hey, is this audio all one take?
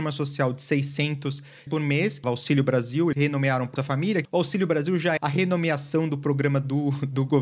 no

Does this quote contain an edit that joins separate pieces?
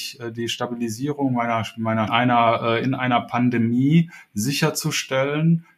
yes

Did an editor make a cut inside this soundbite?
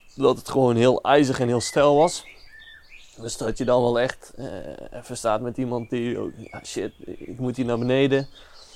no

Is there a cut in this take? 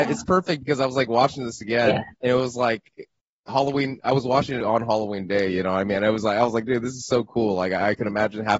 yes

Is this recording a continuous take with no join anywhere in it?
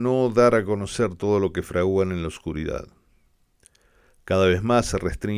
yes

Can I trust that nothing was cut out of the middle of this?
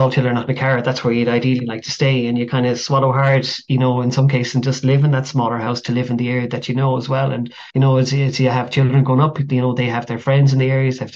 no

